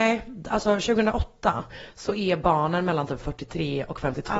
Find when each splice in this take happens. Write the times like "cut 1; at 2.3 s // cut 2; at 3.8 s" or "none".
none